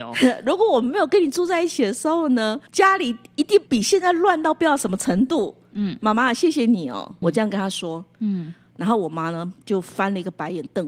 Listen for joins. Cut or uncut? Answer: cut